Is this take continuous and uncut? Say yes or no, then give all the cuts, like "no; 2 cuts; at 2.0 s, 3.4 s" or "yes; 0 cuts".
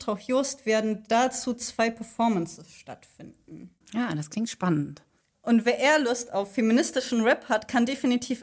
yes; 0 cuts